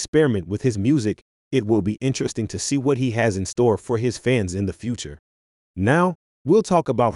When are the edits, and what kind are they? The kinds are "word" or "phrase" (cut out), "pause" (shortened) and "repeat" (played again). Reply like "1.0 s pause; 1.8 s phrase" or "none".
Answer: none